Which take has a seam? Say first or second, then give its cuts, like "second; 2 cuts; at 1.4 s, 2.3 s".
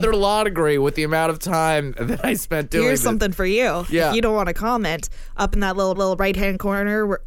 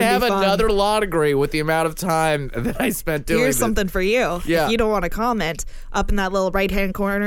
first; 1 cut; at 6.0 s